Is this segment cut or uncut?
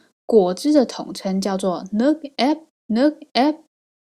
cut